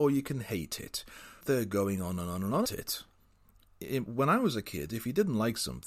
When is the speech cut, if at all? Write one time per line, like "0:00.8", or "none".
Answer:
0:01.4
0:02.6